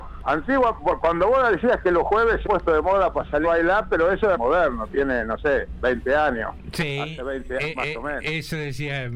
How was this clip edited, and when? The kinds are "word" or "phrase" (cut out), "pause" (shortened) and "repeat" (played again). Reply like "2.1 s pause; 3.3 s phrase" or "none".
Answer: 2.4 s phrase; 3.4 s word; 4.3 s phrase